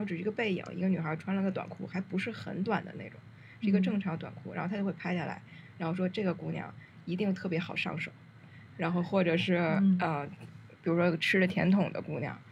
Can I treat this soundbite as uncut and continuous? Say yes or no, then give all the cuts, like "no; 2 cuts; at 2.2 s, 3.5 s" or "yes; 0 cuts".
yes; 0 cuts